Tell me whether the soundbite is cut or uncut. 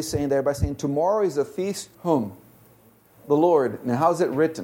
cut